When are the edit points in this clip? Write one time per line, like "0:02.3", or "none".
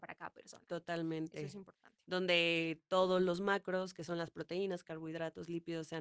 none